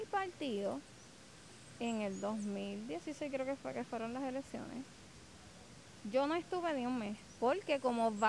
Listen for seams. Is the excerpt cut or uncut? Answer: uncut